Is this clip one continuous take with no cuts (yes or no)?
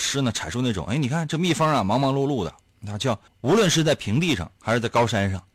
no